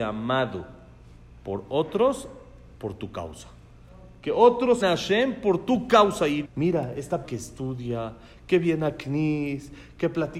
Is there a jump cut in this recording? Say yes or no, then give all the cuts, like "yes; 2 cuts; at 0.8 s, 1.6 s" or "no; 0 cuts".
yes; 3 cuts; at 4.8 s, 6.4 s, 7.2 s